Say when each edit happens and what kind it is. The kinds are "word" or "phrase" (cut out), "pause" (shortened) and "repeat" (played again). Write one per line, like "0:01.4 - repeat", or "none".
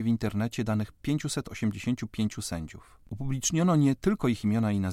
0:03.0 - pause